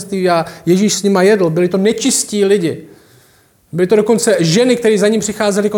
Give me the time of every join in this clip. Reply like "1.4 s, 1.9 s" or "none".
none